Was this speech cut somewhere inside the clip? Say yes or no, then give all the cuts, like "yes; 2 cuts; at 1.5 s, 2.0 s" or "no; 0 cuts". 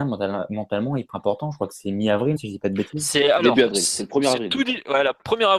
yes; 2 cuts; at 1.1 s, 2.4 s